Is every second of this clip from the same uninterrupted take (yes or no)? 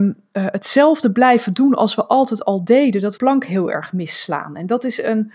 no